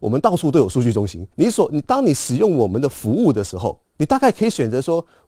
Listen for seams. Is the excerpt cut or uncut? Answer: cut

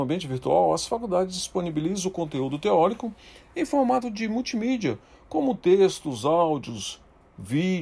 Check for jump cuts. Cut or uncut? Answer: uncut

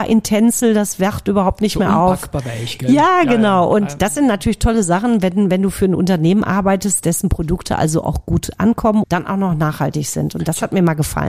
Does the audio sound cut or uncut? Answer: cut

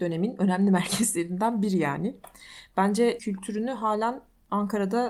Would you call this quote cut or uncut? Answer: cut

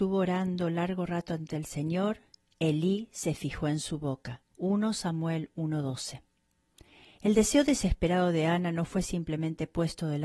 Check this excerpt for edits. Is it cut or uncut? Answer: cut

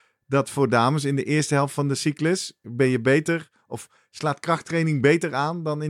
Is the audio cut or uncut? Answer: uncut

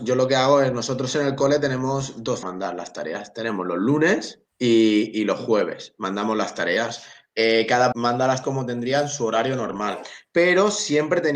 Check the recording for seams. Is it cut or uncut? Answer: cut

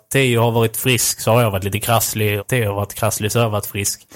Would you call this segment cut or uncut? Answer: cut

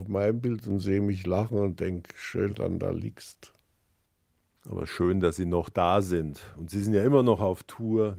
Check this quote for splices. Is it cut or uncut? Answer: cut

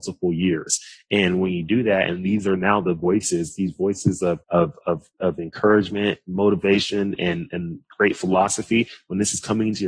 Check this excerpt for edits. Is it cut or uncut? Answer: cut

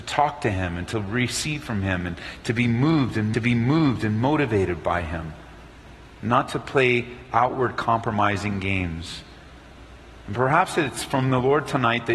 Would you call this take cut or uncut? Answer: cut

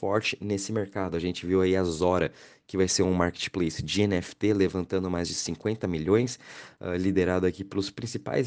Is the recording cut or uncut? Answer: uncut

